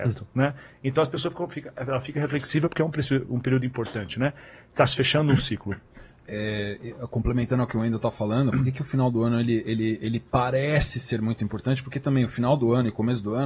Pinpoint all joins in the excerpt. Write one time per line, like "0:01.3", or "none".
none